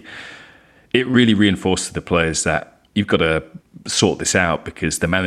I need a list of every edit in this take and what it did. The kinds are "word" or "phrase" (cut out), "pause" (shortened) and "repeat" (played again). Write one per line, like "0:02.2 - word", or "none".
0:02.9 - pause

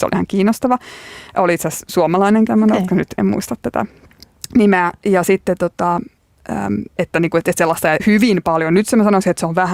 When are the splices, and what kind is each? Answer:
0:01.3 - pause
0:02.5 - word
0:03.2 - word
0:07.0 - word
0:08.0 - phrase

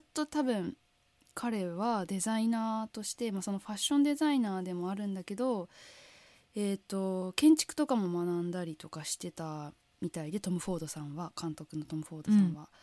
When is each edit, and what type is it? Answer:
none

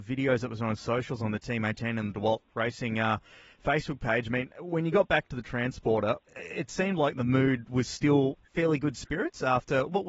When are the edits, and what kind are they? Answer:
0:06.2 - pause
0:08.4 - pause

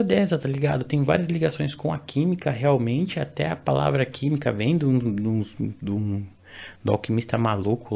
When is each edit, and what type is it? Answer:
none

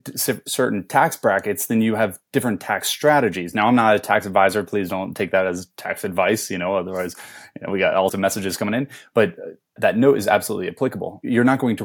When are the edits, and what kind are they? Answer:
0:08.1 - word
0:09.8 - word

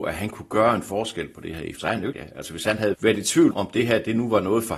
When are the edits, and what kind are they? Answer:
0:01.8 - word
0:02.1 - word
0:02.9 - word
0:03.5 - word

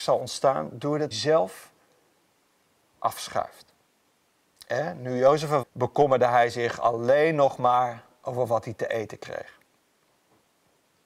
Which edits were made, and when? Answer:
0:01.1 - word
0:02.8 - phrase
0:05.6 - word

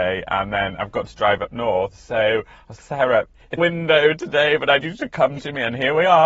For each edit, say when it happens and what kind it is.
0:02.8 - word
0:03.6 - phrase
0:04.8 - word

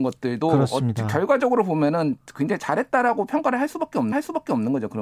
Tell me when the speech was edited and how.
0:04.1 - repeat

